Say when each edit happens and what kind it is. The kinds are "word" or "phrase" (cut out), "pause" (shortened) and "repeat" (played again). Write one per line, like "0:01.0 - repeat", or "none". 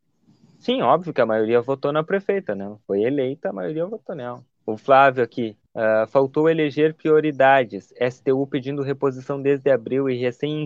0:04.5 - pause
0:05.7 - pause